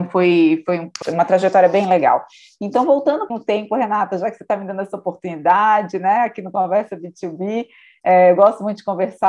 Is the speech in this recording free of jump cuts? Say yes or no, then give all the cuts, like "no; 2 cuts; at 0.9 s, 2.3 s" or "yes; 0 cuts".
no; 2 cuts; at 1.0 s, 3.3 s